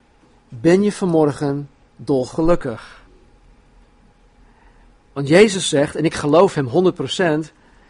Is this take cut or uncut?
uncut